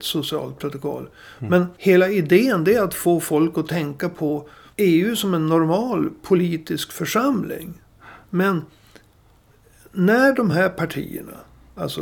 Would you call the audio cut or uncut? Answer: uncut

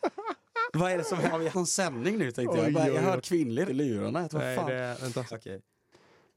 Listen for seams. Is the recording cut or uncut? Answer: cut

